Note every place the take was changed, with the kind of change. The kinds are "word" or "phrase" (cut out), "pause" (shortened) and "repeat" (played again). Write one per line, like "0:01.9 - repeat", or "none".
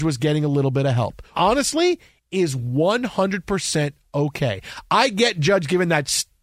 0:01.3 - word